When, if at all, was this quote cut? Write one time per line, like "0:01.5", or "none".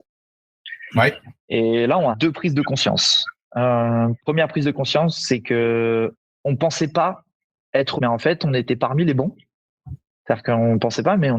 0:02.1
0:08.0